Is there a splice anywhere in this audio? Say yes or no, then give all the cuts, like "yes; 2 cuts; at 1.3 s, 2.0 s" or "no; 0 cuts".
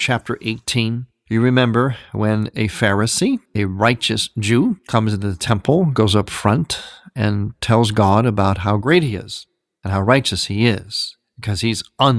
no; 0 cuts